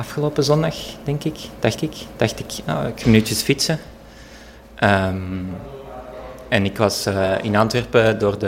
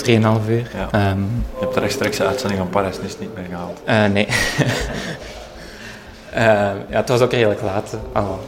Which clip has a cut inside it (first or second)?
first